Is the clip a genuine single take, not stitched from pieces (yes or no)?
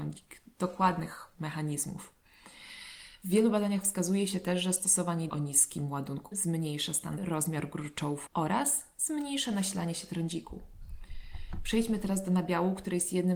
no